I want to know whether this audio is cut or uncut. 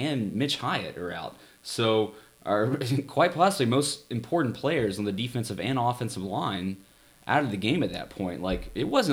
uncut